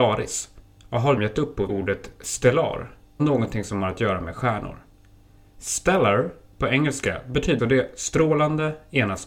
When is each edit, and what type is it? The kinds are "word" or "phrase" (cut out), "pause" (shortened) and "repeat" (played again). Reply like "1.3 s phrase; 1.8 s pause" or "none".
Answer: 1.2 s word; 1.7 s word; 3.2 s word; 7.6 s word